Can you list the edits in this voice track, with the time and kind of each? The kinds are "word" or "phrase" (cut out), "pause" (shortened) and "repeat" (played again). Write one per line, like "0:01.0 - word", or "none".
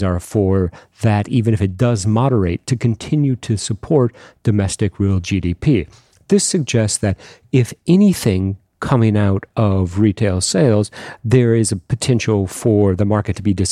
none